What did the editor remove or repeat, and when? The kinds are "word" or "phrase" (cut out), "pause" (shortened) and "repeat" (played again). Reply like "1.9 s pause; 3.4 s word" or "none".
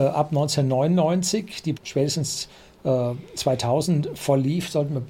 1.8 s word